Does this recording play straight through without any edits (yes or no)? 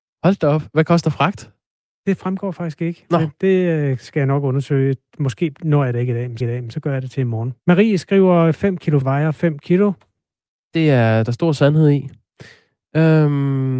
no